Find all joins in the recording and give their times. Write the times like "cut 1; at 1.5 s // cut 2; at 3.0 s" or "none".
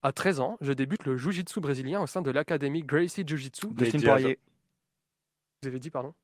none